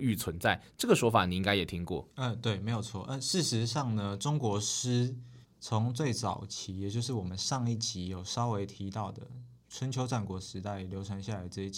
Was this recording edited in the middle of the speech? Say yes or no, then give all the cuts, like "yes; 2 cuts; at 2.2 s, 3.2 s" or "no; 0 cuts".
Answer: yes; 2 cuts; at 2.1 s, 5.4 s